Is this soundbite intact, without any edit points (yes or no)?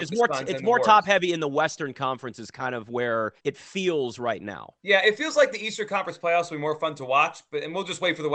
no